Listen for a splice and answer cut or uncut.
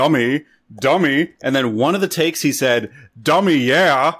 uncut